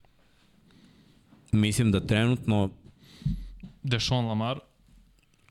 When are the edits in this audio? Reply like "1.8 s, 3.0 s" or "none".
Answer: none